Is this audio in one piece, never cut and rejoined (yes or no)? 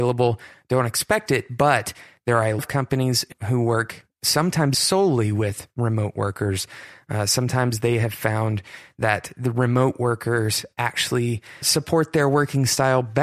no